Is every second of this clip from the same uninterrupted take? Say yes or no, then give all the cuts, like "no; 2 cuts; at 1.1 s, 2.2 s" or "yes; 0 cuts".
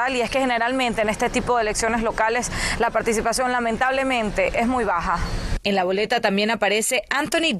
yes; 0 cuts